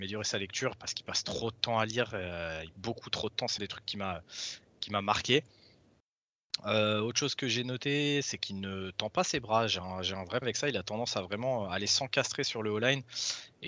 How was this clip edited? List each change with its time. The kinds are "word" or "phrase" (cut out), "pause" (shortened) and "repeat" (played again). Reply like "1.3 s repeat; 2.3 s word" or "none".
2.7 s word; 3.6 s word; 10.4 s word